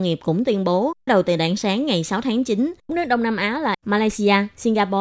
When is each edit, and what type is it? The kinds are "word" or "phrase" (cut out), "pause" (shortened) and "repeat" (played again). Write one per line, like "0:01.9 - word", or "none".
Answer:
0:01.1 - word
0:02.9 - word
0:03.7 - word